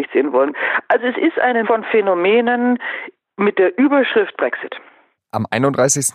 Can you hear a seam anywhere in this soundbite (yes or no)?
yes